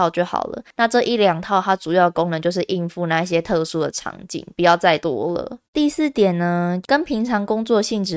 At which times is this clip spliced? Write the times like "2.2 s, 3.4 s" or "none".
5.7 s

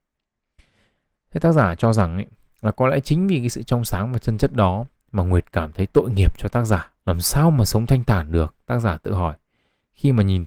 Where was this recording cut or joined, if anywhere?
7.0 s

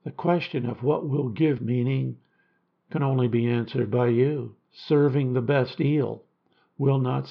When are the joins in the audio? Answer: 1.6 s, 4.6 s

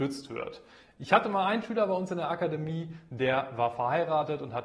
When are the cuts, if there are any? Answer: none

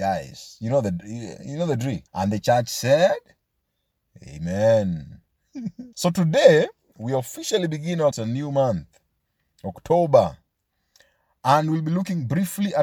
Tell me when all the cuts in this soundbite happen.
2.1 s, 5.9 s, 8.1 s

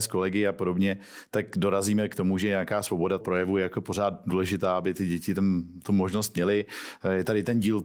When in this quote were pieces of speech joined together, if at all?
3.2 s

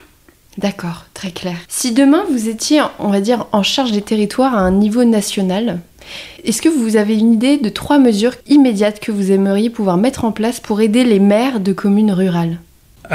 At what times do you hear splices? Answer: 1.7 s, 6.4 s, 8.4 s

